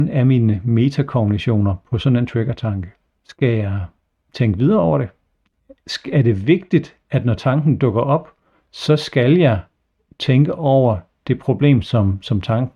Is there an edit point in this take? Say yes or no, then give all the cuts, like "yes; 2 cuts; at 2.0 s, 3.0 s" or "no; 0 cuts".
no; 0 cuts